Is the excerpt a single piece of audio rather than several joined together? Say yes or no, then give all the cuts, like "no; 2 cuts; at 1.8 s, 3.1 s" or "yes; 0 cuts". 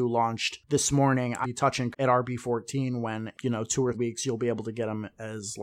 no; 4 cuts; at 1.4 s, 1.9 s, 3.3 s, 3.9 s